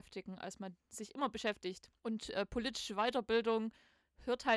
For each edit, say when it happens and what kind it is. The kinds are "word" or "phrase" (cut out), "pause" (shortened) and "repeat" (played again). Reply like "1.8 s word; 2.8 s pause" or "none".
2.0 s pause